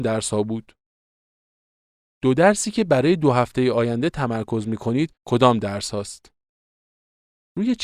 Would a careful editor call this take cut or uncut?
cut